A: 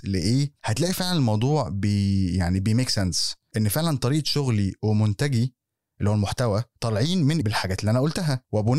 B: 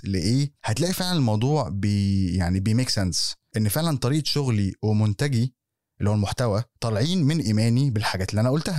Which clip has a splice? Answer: A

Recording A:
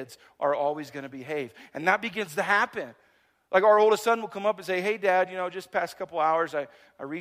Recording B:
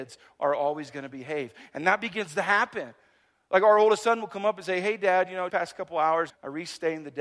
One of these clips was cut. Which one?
B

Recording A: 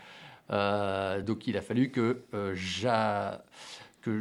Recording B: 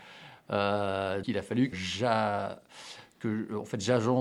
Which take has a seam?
B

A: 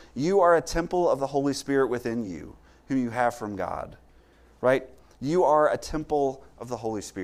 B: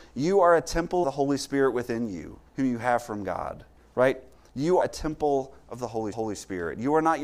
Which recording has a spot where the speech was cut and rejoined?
B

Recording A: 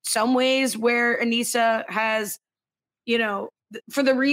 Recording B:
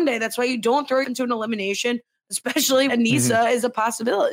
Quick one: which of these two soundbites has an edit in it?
B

